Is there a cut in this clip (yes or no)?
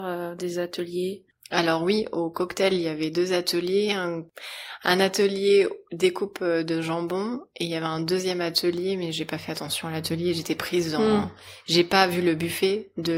no